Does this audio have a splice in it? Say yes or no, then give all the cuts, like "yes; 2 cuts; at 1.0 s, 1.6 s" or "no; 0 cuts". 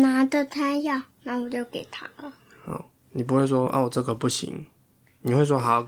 yes; 1 cut; at 1.1 s